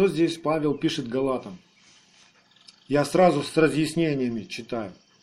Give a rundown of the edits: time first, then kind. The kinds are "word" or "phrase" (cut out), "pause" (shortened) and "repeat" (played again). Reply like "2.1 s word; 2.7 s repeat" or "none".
none